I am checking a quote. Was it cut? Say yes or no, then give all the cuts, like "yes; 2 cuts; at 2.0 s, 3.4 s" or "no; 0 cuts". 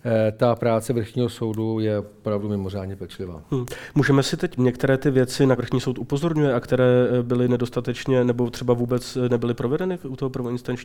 yes; 2 cuts; at 4.6 s, 5.6 s